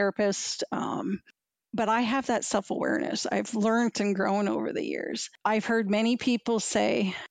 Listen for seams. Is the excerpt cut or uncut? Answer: uncut